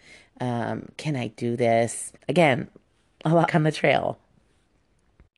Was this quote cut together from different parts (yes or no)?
yes